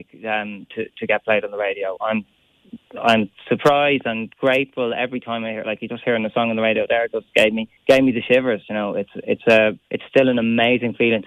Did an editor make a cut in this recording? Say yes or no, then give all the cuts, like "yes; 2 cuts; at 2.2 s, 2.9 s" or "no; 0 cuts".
yes; 2 cuts; at 7.8 s, 9.8 s